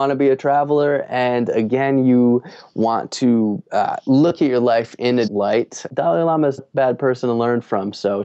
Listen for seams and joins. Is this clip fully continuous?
no; 4 cuts; at 3.7 s, 5.3 s, 5.9 s, 6.6 s

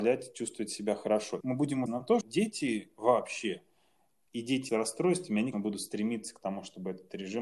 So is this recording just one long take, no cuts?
no; 5 cuts; at 1.4 s, 1.9 s, 2.2 s, 4.7 s, 5.5 s

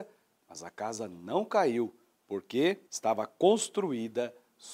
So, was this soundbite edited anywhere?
yes; 1 cut; at 2.9 s

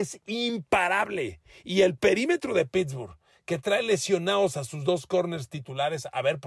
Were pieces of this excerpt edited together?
no; 0 cuts

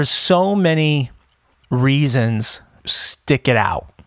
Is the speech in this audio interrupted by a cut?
yes; 1 cut; at 2.8 s

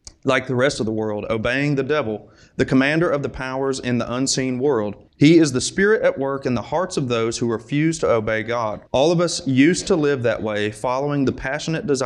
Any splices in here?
yes; 2 cuts; at 5.1 s, 8.9 s

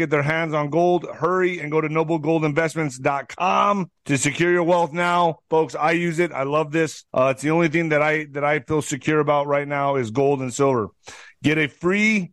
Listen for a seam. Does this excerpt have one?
yes; 2 cuts; at 4.0 s, 7.1 s

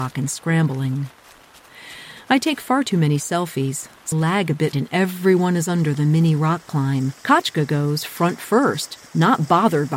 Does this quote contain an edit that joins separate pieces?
yes; 4 cuts; at 4.1 s, 4.7 s, 7.2 s, 9.1 s

